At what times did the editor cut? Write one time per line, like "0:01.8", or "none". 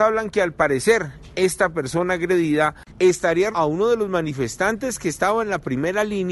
0:03.5